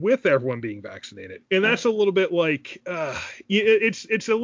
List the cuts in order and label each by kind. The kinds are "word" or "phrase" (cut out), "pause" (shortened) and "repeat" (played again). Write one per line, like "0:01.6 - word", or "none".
0:01.5 - pause